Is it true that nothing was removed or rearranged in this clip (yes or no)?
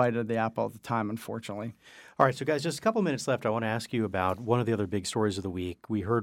yes